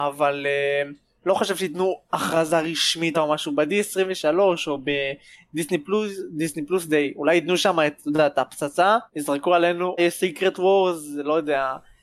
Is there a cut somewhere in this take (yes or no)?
yes